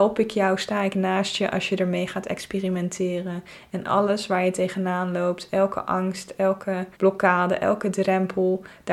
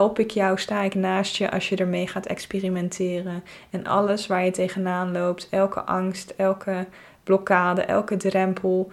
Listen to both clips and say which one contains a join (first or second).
first